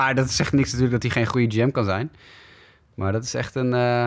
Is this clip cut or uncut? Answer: uncut